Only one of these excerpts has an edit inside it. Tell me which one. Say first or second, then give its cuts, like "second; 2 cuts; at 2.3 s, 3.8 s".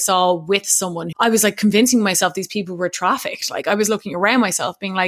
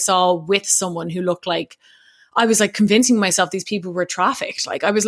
first; 1 cut; at 1.1 s